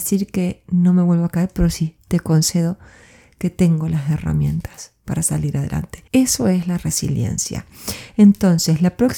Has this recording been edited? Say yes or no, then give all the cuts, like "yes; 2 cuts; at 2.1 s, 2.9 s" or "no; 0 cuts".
yes; 1 cut; at 6.1 s